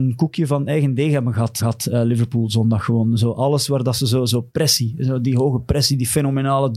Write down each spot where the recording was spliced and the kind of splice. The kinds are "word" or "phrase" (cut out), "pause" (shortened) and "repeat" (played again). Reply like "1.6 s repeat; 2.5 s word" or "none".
1.6 s repeat

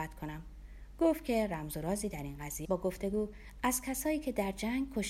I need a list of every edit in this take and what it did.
2.6 s phrase

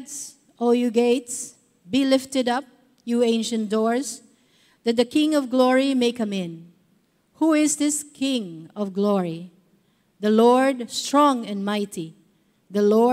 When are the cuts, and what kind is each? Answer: none

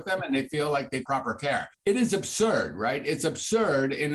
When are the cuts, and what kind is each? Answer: 1.1 s phrase; 1.7 s pause

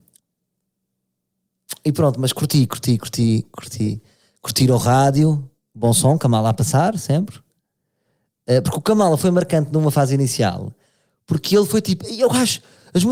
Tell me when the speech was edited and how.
none

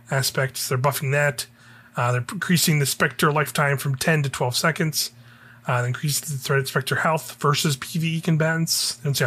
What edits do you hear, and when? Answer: none

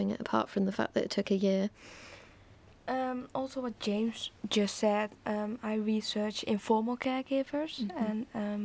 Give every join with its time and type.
none

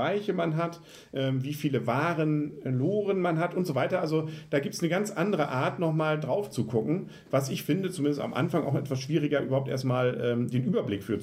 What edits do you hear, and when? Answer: none

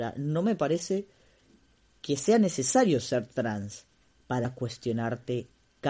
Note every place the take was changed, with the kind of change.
4.4 s word

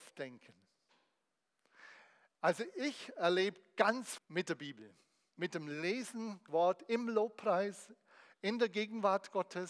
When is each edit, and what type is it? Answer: 4.2 s word; 6.5 s word

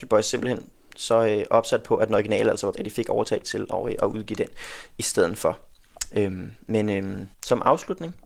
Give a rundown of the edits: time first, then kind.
2.7 s word; 3.4 s word; 7.3 s pause

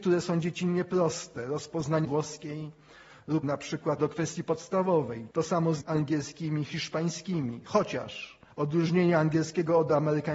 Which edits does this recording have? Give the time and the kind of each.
2.0 s word; 3.4 s word; 4.0 s word; 5.3 s pause; 5.8 s word; 8.5 s pause

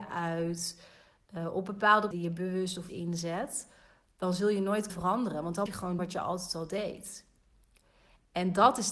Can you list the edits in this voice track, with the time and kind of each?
2.1 s word; 2.9 s word; 4.9 s word; 5.7 s word; 6.0 s word

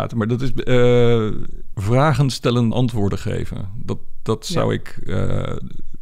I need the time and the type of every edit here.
1.7 s word; 2.7 s word

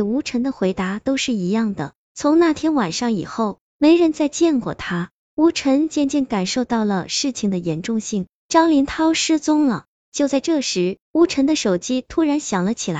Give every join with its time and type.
11.0 s pause

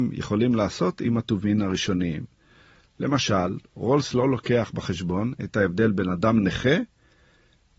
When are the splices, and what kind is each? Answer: none

